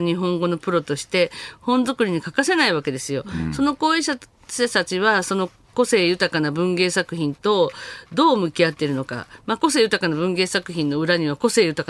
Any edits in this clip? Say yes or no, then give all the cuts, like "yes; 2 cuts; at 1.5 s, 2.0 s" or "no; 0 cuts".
no; 0 cuts